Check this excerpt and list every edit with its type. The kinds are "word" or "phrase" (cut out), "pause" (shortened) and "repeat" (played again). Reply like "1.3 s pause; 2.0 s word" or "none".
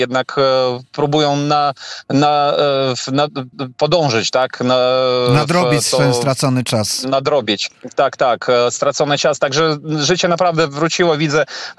3.5 s repeat